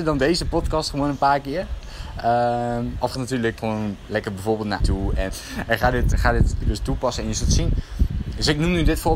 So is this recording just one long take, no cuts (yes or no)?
no